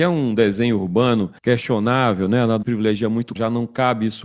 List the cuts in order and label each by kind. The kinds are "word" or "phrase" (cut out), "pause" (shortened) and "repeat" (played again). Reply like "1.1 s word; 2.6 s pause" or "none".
1.4 s pause; 2.6 s phrase; 3.4 s word